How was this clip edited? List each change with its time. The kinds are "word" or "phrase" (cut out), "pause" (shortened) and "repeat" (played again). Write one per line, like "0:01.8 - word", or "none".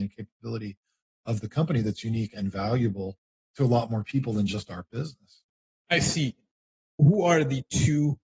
none